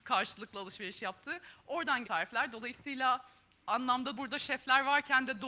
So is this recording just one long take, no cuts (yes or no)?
no